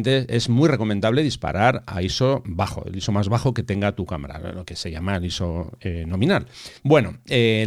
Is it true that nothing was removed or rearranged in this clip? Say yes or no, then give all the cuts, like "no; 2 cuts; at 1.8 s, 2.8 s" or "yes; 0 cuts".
no; 1 cut; at 6.8 s